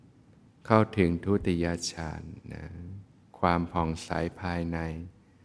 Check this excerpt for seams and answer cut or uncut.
uncut